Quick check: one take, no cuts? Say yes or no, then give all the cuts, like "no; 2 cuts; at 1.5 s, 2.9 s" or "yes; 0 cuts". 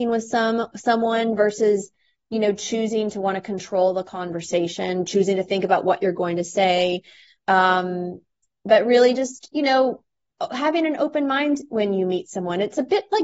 yes; 0 cuts